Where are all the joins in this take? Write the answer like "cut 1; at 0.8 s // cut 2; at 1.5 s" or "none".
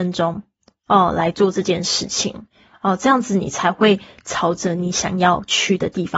none